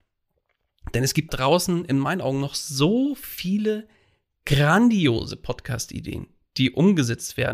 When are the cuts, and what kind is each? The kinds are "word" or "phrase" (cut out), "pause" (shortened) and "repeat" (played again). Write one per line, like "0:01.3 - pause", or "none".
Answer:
0:01.3 - word